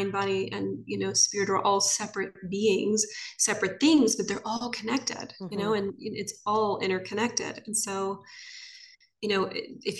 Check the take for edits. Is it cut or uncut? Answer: uncut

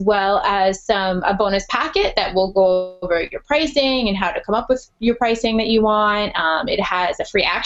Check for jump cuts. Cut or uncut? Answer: uncut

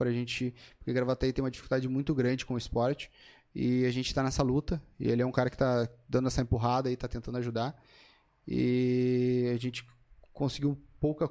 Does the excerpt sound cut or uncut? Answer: uncut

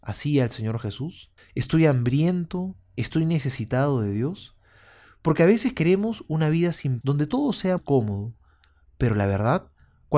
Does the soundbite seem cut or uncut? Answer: cut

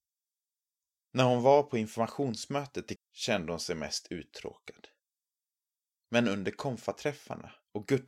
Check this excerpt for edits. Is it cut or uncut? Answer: cut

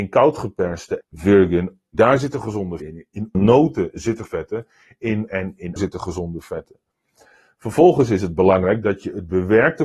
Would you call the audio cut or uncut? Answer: cut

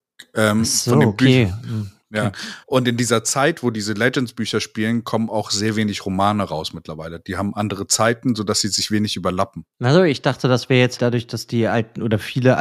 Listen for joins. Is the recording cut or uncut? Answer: cut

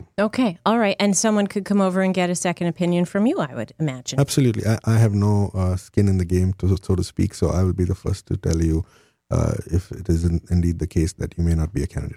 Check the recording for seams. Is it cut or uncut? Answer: uncut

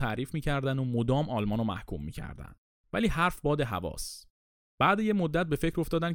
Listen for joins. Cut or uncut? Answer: uncut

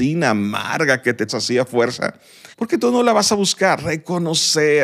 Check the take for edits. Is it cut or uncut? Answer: cut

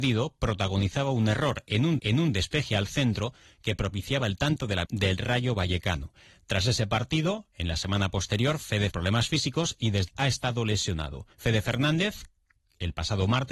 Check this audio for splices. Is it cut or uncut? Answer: cut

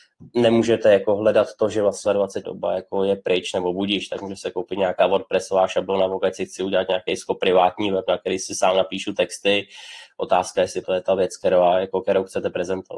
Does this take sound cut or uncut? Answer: cut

